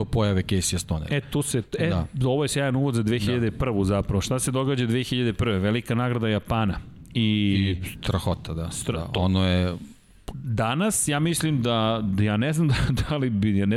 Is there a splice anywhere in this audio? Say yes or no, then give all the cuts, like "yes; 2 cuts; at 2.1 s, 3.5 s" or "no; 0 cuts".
no; 0 cuts